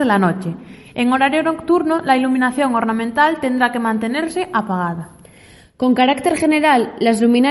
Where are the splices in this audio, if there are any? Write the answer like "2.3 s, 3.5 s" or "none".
none